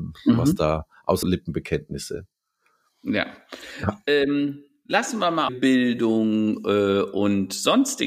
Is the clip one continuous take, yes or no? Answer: no